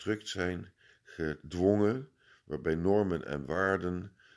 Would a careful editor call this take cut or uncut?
uncut